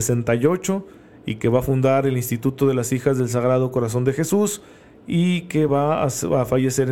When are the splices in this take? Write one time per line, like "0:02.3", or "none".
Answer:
none